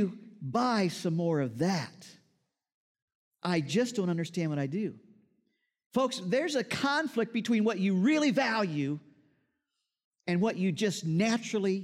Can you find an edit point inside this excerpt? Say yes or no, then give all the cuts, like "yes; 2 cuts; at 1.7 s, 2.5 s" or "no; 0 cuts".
no; 0 cuts